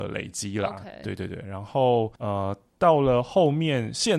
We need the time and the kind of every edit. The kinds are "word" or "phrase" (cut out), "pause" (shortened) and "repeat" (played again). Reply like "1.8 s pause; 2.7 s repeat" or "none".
2.2 s pause

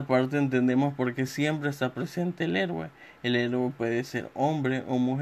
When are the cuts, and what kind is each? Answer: none

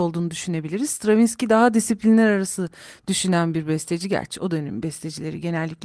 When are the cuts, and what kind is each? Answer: none

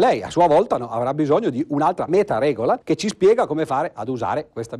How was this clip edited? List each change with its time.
2.1 s word; 2.8 s pause

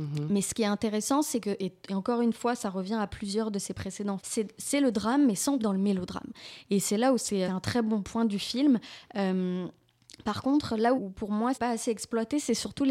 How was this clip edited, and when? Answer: 4.2 s word; 5.6 s word; 7.5 s word; 11.0 s word; 11.5 s word

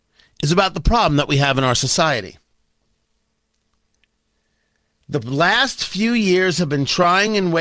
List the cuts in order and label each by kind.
none

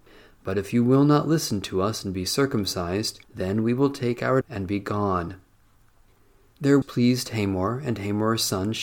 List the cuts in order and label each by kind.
3.2 s pause; 4.4 s word; 6.8 s word

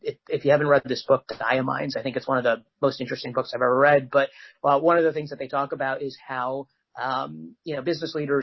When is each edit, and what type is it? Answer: none

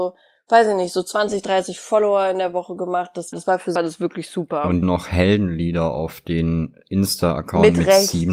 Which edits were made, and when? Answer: 3.3 s word; 3.8 s phrase; 4.8 s phrase

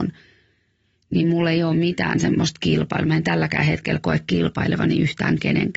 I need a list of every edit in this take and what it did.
none

